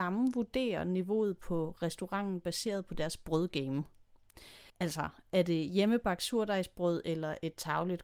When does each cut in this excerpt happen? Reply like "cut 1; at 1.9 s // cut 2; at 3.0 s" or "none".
cut 1; at 4.7 s